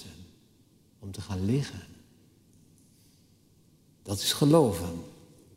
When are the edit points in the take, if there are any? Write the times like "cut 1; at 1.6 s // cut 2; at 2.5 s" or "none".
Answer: none